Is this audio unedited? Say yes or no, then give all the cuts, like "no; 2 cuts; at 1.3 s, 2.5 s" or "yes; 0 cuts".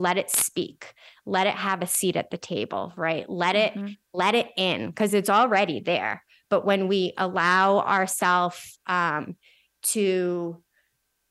yes; 0 cuts